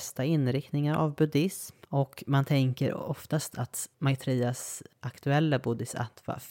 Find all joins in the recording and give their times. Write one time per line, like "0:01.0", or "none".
0:01.8
0:03.9

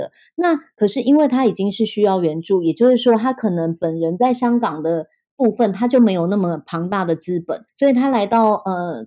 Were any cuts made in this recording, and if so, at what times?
0:07.7

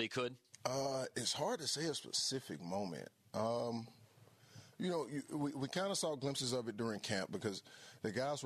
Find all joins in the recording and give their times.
none

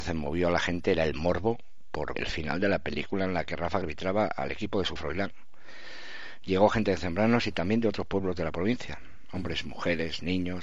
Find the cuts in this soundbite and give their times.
0:02.1
0:03.8
0:05.0

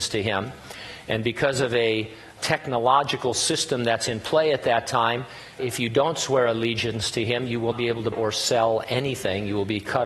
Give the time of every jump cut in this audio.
0:02.4
0:05.6
0:07.7
0:08.1

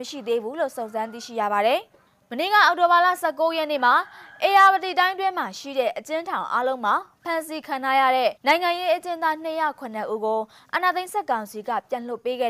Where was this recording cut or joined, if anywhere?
0:08.4

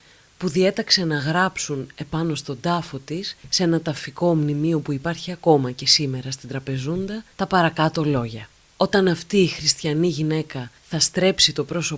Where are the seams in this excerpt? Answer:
0:03.4
0:07.3
0:08.6
0:10.8

